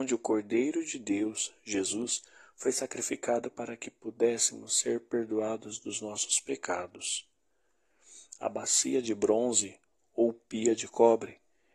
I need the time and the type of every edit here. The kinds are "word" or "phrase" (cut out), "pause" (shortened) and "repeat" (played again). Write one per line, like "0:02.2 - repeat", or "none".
none